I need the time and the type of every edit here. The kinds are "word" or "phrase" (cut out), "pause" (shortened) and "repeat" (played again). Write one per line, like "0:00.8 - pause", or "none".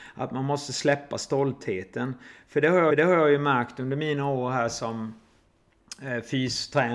0:02.9 - repeat